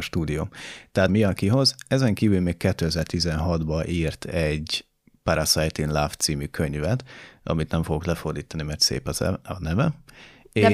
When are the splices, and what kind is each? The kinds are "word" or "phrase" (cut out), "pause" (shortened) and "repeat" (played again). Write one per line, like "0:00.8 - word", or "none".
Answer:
0:01.1 - word
0:05.0 - pause
0:08.8 - word

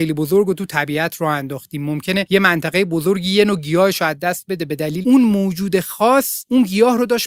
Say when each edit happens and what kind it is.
0:05.0 - word

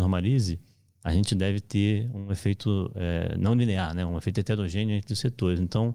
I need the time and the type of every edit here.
none

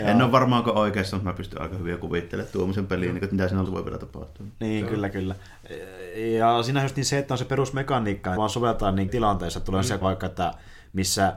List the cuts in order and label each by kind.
0:03.7 - word
0:08.4 - phrase
0:09.1 - word
0:10.0 - word

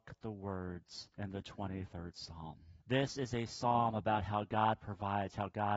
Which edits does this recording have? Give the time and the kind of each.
0:01.1 - pause
0:02.8 - pause

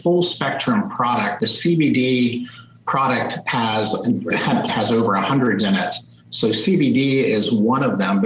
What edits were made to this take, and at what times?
0:01.4 - word
0:04.3 - word
0:04.7 - word
0:05.6 - word

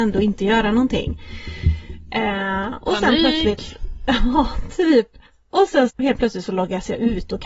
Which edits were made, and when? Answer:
0:05.9 - word

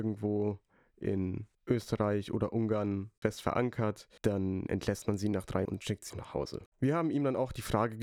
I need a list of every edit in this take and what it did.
0:01.5 - pause
0:05.6 - word
0:06.1 - word
0:06.7 - pause

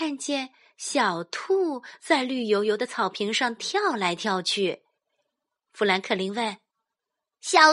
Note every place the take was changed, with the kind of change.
none

